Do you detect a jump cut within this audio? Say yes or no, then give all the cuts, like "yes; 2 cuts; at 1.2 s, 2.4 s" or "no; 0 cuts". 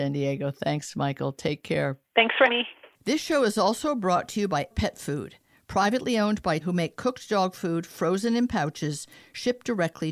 yes; 5 cuts; at 2.1 s, 2.5 s, 2.9 s, 4.7 s, 6.6 s